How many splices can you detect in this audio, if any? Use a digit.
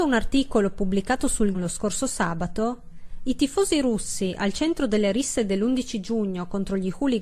1